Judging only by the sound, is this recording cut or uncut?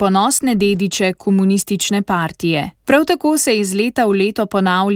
cut